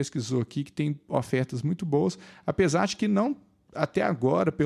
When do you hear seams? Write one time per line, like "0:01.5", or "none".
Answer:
none